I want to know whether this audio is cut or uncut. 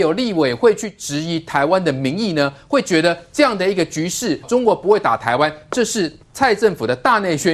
cut